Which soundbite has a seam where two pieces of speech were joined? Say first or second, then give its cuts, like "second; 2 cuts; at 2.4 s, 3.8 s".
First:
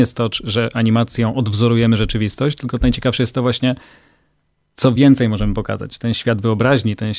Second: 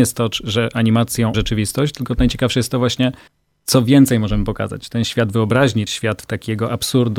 second; 3 cuts; at 1.3 s, 3.3 s, 5.9 s